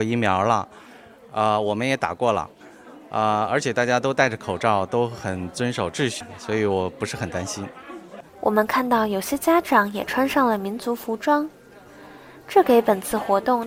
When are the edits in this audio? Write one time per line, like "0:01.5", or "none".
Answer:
0:08.3